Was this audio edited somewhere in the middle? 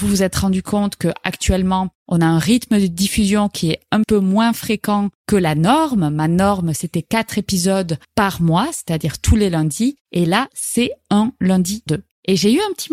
yes; 3 cuts; at 4.0 s, 8.0 s, 11.9 s

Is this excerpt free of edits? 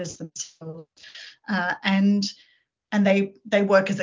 yes; 0 cuts

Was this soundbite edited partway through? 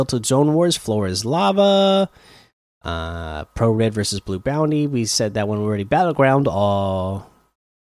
no; 0 cuts

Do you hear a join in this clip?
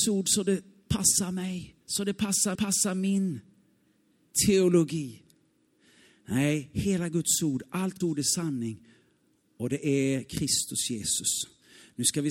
yes; 3 cuts; at 1.8 s, 2.5 s, 8.0 s

